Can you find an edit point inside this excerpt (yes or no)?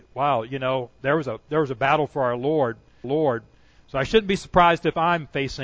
yes